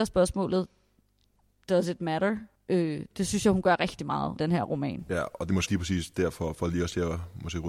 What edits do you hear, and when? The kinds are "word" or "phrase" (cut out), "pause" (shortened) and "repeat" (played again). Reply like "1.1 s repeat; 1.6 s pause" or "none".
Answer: 2.6 s pause; 4.4 s word; 5.7 s word